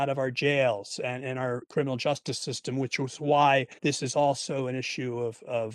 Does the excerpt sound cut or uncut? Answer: cut